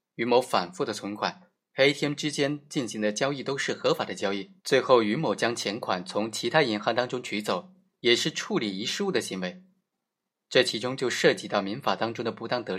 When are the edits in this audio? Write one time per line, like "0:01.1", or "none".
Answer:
0:04.6